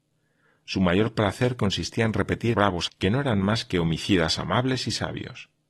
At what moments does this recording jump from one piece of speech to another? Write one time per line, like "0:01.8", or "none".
0:02.5
0:02.9

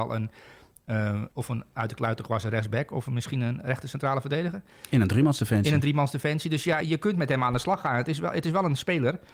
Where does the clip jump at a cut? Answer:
0:01.3
0:06.8

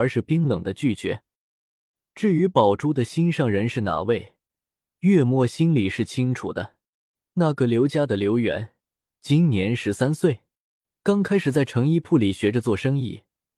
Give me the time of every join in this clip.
none

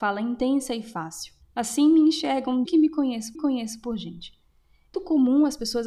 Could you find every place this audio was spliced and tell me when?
0:01.4
0:02.6
0:03.3
0:04.9

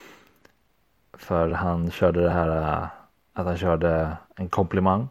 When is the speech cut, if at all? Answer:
none

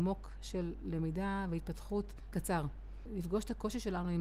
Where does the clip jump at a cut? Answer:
0:02.3

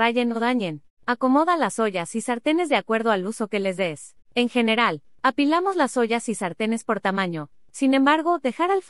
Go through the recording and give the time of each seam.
0:00.9
0:04.2

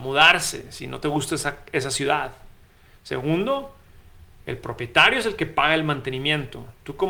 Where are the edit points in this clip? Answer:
none

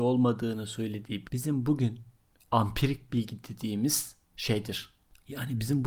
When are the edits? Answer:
0:01.2

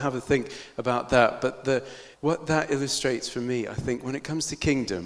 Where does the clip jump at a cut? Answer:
0:02.1

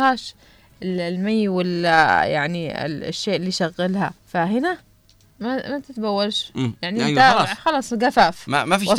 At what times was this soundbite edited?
0:04.2

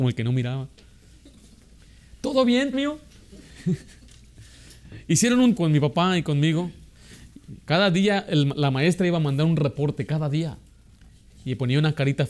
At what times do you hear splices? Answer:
0:02.7
0:05.6

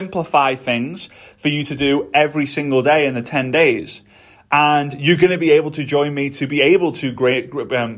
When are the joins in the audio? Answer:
none

